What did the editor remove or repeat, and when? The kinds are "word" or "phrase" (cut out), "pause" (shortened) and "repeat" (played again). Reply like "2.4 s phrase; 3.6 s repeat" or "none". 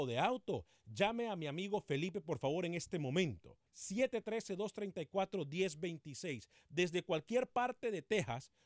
3.7 s pause